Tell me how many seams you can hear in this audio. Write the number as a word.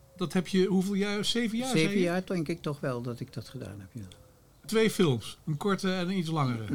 one